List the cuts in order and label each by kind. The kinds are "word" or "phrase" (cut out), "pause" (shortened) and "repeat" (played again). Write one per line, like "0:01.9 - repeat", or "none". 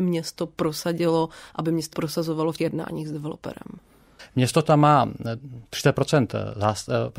0:01.9 - word
0:02.6 - word